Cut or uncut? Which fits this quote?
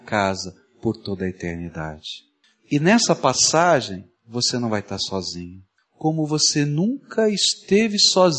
cut